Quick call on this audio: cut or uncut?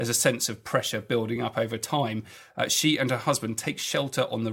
uncut